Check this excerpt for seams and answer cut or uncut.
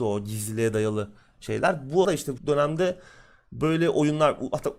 cut